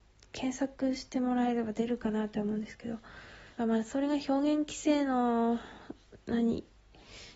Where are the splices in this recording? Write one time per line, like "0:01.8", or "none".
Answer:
0:03.5